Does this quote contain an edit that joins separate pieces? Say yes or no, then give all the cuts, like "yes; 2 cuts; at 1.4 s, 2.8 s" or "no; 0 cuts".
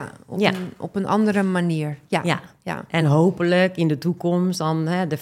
no; 0 cuts